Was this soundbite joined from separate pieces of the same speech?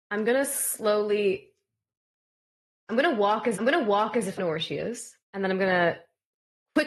yes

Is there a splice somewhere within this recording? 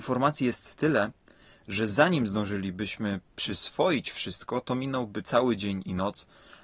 no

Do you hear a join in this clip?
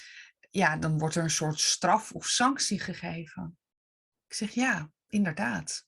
no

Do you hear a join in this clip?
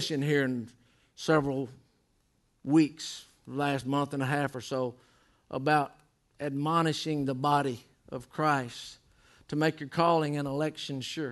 no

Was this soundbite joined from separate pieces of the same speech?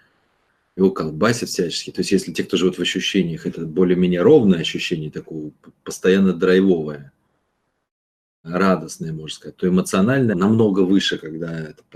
yes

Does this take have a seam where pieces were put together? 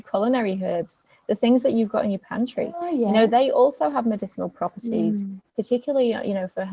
no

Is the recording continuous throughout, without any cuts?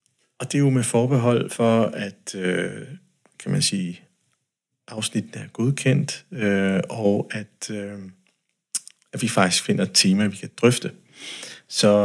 yes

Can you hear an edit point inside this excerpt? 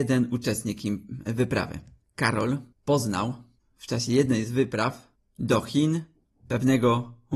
no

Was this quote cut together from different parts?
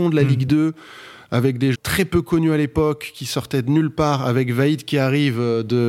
yes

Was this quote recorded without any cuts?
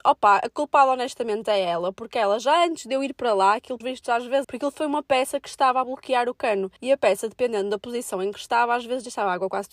no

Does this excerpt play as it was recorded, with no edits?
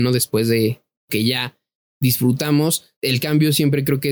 no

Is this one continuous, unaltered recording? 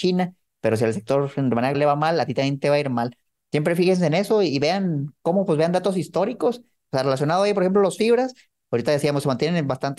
no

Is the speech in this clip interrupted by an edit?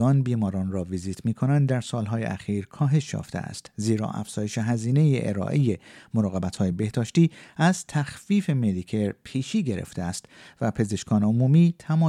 no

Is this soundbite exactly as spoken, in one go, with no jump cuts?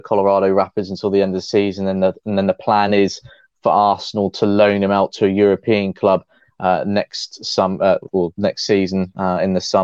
yes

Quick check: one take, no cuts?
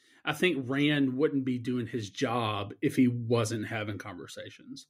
yes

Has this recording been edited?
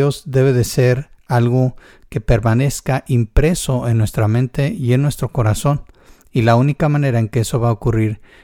no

